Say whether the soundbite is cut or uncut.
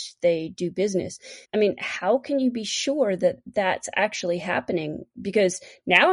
cut